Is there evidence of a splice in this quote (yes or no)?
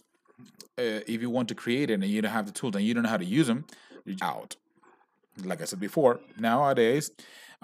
yes